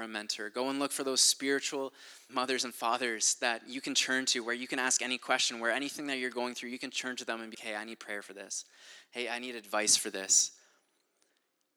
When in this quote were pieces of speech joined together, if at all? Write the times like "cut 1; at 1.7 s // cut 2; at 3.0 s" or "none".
cut 1; at 2.3 s // cut 2; at 7.5 s